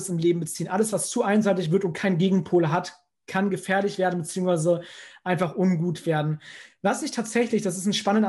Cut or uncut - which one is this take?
uncut